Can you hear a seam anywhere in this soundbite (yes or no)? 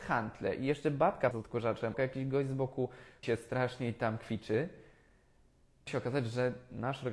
yes